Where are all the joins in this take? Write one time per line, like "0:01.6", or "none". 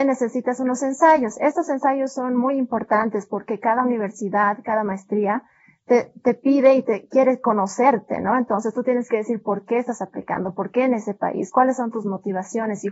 none